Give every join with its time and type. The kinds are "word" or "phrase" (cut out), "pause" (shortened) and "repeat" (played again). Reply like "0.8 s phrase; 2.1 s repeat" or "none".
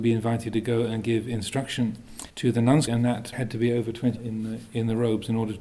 2.3 s pause; 2.9 s word; 3.3 s word; 4.2 s word